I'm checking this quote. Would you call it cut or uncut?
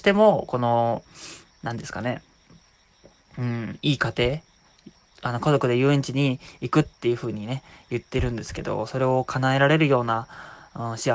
uncut